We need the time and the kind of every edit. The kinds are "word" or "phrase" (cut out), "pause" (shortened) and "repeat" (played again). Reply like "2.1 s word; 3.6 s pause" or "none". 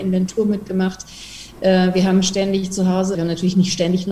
3.1 s phrase